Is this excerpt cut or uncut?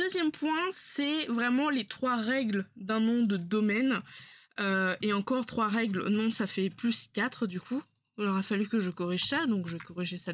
uncut